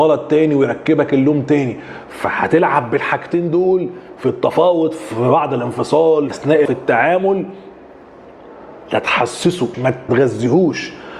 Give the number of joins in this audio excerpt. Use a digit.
4